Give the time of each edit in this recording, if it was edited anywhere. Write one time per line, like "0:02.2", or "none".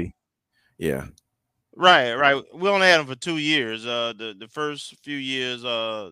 none